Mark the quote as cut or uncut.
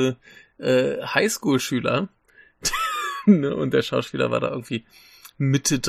uncut